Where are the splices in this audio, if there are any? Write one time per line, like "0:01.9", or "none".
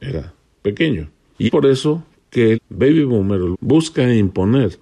0:01.5
0:02.5
0:03.5